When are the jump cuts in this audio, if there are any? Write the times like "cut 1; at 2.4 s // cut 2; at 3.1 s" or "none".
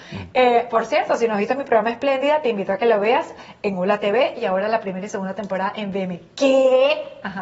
none